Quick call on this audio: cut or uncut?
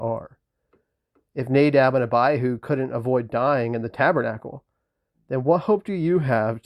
uncut